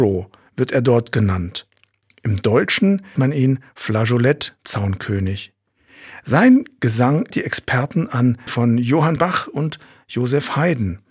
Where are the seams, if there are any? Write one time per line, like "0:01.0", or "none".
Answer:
0:03.2
0:07.3
0:08.5
0:09.2